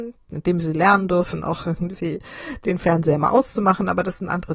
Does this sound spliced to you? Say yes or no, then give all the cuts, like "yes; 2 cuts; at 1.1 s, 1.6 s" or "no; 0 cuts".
no; 0 cuts